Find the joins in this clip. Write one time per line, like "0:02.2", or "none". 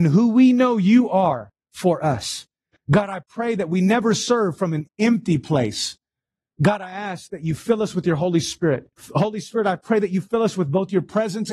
0:08.9